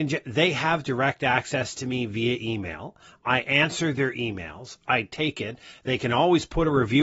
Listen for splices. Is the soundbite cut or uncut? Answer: uncut